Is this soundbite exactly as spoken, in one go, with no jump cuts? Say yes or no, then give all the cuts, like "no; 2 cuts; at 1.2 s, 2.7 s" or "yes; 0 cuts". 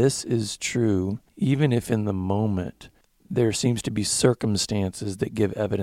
no; 2 cuts; at 1.3 s, 3.0 s